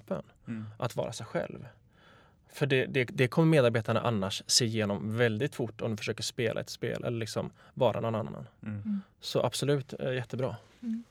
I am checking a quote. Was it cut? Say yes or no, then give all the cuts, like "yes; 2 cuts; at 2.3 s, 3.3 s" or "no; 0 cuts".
no; 0 cuts